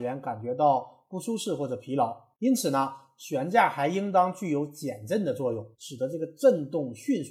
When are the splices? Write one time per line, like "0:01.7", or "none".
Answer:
0:02.3
0:05.7

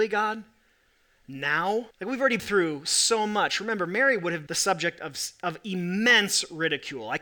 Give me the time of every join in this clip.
0:01.9
0:02.4
0:04.5

